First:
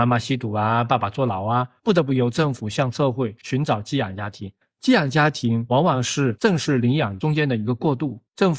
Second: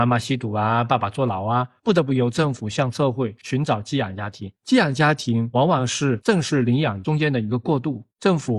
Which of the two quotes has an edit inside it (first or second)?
second